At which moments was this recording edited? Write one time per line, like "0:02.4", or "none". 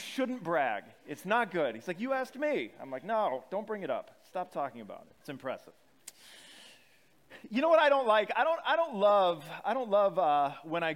0:05.2

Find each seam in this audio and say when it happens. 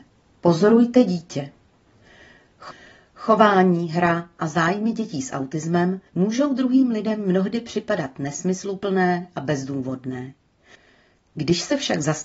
0:06.1

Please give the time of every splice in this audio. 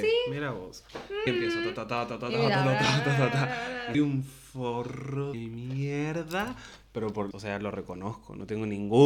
0:01.3
0:03.9
0:05.3
0:07.3

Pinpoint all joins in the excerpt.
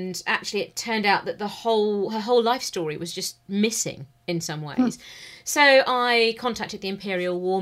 none

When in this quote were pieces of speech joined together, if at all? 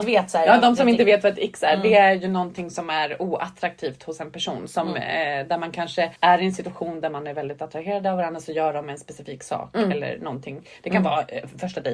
0:06.2

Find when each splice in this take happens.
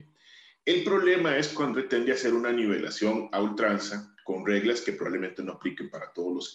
0:01.7

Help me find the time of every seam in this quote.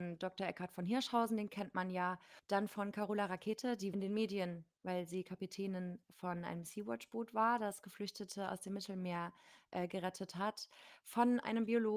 0:03.9

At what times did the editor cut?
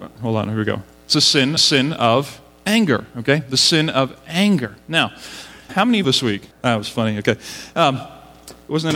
0:01.6
0:05.7
0:06.0
0:06.5

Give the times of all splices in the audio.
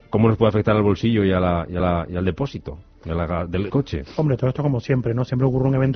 0:01.8
0:03.7

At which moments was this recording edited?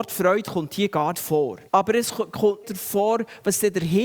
0:01.1
0:01.7
0:02.6

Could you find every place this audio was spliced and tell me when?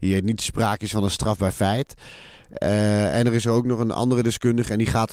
none

